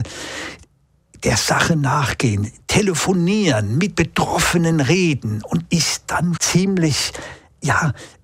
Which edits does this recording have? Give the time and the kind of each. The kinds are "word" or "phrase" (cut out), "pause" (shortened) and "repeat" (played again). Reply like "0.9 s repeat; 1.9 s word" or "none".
3.9 s word; 5.7 s word; 6.4 s word